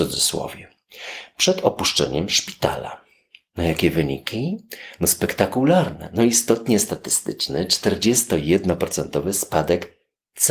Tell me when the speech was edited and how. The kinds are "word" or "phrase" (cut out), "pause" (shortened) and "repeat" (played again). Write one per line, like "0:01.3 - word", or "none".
none